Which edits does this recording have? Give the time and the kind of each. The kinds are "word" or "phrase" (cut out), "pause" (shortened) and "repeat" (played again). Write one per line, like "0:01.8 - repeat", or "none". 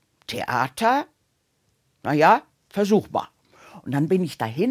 none